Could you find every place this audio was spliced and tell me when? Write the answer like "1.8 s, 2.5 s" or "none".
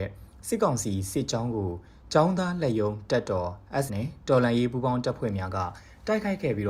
3.9 s